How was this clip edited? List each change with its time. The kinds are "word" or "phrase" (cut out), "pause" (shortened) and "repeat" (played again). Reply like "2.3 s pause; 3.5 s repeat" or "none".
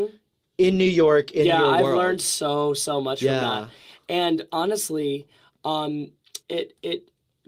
6.4 s pause